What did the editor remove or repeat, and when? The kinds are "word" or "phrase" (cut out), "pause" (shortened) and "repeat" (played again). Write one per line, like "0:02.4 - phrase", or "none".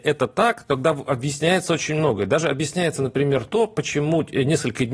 none

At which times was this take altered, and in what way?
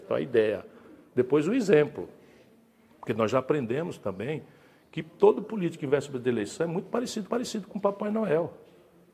0:07.3 - repeat

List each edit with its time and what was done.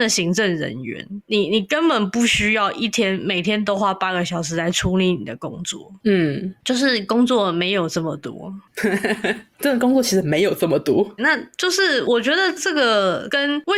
0:11.2 - word

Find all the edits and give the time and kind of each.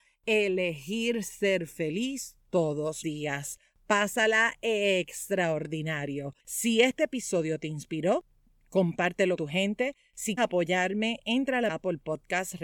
0:03.0 - word
0:06.4 - pause
0:09.4 - word
0:10.4 - word
0:11.7 - phrase

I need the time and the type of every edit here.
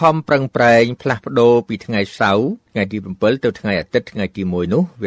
0:02.6 - pause

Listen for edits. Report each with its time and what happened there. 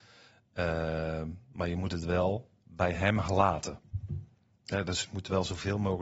none

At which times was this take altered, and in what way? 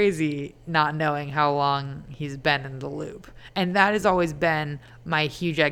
none

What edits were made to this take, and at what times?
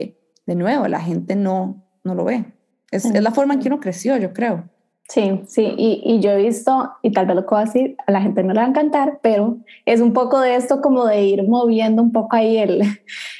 none

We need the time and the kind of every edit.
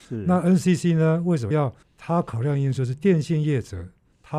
0:01.5 - word

